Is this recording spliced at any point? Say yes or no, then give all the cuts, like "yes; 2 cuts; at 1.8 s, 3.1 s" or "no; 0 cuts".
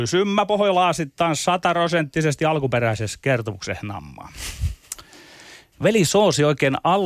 no; 0 cuts